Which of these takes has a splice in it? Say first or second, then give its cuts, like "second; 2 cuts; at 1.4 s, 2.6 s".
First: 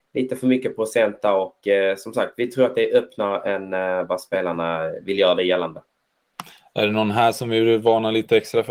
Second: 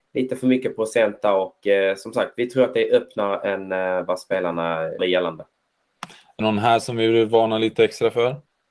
second; 2 cuts; at 5.0 s, 6.4 s